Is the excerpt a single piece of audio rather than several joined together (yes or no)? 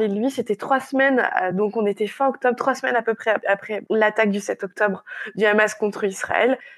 yes